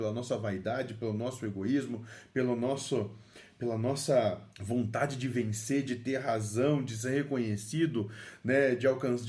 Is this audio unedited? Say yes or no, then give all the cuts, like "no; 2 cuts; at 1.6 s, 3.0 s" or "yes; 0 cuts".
no; 1 cut; at 4.5 s